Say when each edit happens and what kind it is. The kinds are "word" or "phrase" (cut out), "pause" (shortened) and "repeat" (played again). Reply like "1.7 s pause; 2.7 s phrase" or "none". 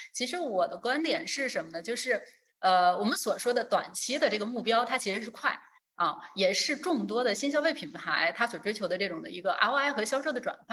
none